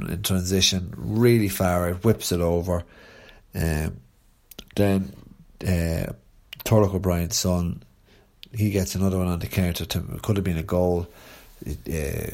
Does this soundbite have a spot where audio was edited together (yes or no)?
no